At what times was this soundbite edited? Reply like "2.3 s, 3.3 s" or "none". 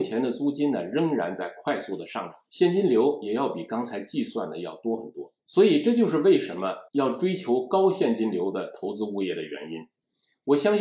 5.4 s